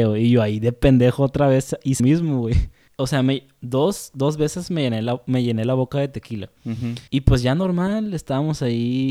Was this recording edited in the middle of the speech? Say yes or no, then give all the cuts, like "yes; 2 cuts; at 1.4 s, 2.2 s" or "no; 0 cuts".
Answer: yes; 2 cuts; at 2.0 s, 7.1 s